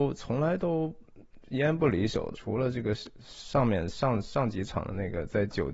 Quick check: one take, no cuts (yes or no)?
no